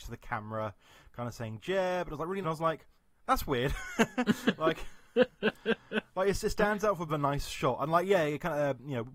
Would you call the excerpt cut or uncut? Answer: cut